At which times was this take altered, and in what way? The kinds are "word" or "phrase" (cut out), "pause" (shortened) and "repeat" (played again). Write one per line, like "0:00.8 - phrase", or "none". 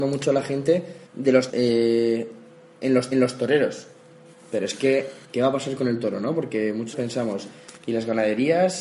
0:01.1 - pause
0:01.5 - word
0:03.1 - repeat
0:05.2 - pause
0:06.9 - word
0:07.8 - pause